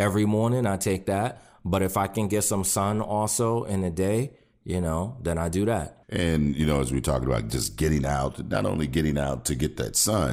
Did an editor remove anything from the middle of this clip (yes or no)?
no